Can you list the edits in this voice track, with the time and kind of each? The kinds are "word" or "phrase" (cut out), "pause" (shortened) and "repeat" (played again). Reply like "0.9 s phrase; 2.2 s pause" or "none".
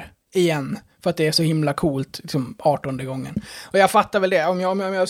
none